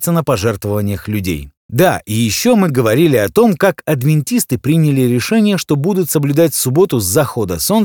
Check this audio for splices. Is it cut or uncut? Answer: cut